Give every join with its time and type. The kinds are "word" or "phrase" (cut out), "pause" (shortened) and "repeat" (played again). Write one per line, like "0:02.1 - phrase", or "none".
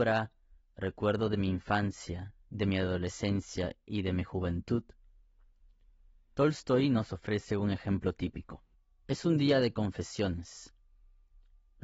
0:08.7 - pause